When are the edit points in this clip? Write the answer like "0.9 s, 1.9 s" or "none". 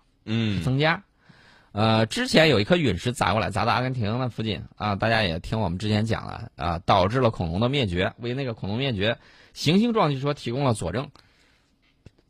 none